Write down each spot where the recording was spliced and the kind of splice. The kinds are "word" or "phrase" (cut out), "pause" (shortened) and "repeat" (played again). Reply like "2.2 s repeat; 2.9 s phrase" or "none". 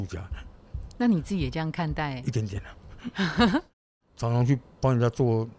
none